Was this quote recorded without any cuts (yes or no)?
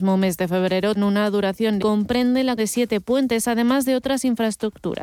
no